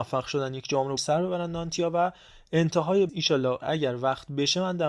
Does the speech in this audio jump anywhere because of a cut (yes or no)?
yes